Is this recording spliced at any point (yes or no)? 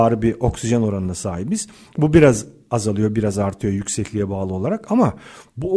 no